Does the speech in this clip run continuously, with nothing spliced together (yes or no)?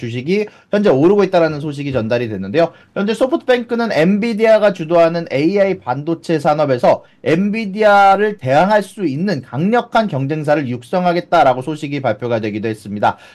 yes